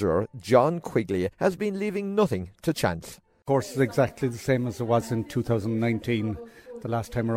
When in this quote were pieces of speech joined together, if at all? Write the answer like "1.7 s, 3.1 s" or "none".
1.3 s